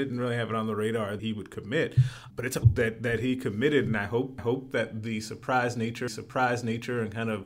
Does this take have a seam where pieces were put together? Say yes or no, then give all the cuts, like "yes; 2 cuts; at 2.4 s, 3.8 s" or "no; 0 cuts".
yes; 5 cuts; at 1.2 s, 2.3 s, 2.6 s, 4.4 s, 6.1 s